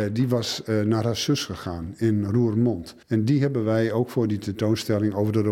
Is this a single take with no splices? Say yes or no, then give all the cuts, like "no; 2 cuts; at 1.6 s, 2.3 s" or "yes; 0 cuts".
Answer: no; 1 cut; at 3.0 s